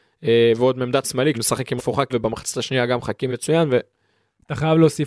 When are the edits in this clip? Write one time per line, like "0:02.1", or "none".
0:01.0
0:01.3
0:01.8
0:02.1
0:03.3